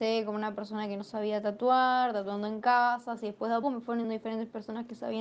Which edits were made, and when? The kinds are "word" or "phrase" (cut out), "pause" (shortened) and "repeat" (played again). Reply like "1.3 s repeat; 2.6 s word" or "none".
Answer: 3.6 s word; 4.0 s word

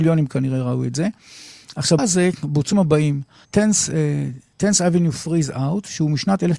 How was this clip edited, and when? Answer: 2.0 s word; 2.7 s word; 3.4 s word

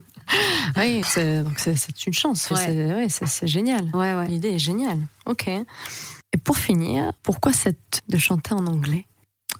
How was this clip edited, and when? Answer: 1.0 s word; 2.5 s word; 7.2 s pause; 8.0 s word

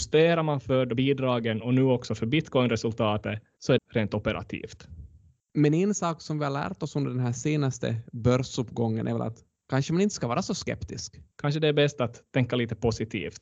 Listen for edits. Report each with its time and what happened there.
0.9 s word; 3.8 s phrase

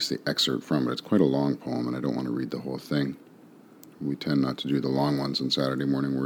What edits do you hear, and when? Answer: none

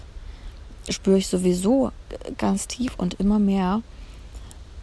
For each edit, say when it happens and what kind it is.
2.4 s word

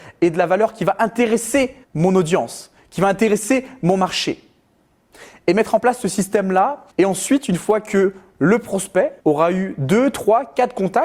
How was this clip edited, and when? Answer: 1.8 s pause; 6.9 s pause; 9.2 s pause

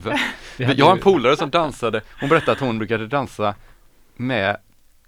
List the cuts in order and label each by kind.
none

